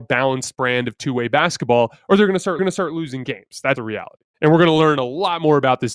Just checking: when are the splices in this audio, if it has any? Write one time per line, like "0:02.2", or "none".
0:02.6
0:03.8
0:04.3